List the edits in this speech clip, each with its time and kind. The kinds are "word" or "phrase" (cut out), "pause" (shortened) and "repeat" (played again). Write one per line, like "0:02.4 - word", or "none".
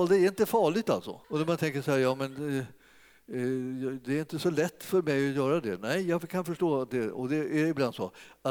0:01.2 - pause